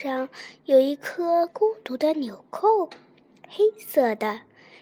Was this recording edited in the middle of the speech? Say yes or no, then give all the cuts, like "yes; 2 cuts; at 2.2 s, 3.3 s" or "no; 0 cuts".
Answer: no; 0 cuts